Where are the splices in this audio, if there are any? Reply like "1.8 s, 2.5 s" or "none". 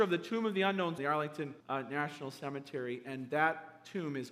1.0 s, 1.6 s